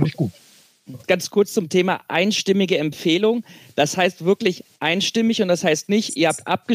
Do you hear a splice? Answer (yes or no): no